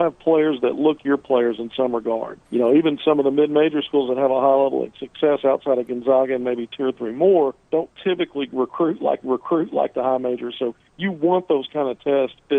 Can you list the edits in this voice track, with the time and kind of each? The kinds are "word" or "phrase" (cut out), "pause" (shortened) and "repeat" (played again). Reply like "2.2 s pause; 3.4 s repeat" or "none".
1.0 s word; 2.4 s pause; 7.6 s pause; 9.2 s repeat

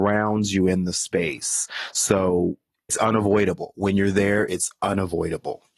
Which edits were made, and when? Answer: 2.9 s word

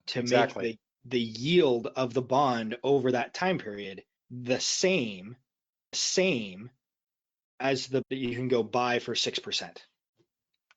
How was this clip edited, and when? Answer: 4.2 s pause; 5.9 s repeat; 8.0 s word

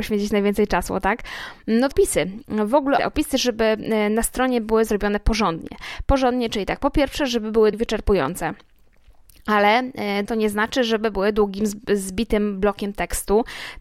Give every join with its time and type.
1.9 s word; 3.0 s word; 7.7 s word; 10.2 s word

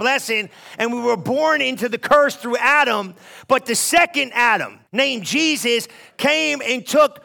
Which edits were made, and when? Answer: 4.9 s pause

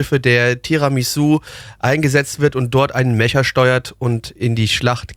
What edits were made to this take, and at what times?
none

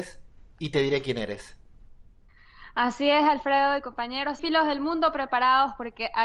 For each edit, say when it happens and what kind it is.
4.4 s word

